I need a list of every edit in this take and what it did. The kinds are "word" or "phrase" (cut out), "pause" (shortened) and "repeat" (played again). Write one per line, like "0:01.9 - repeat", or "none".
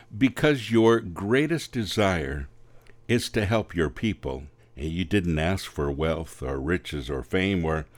0:04.6 - pause